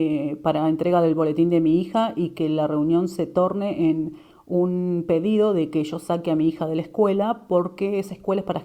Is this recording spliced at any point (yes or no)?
no